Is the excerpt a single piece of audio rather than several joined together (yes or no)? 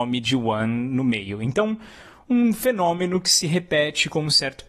yes